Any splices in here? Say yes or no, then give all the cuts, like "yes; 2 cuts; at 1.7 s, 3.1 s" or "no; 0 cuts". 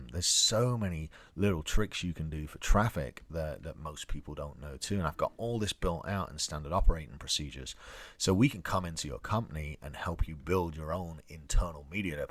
no; 0 cuts